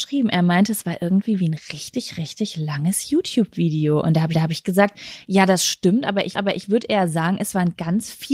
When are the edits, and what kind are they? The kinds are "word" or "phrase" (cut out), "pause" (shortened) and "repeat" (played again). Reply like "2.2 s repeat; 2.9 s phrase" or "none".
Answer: 4.3 s repeat; 6.4 s repeat